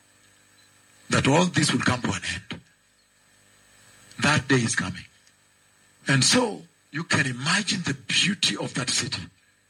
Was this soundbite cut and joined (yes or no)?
no